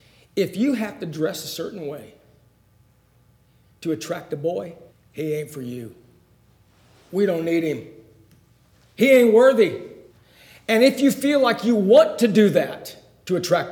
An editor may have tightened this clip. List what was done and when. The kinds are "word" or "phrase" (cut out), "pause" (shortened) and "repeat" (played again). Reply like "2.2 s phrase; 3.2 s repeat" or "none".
4.9 s pause; 10.1 s pause